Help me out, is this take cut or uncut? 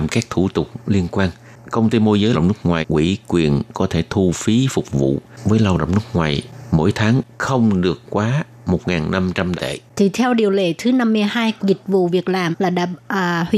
cut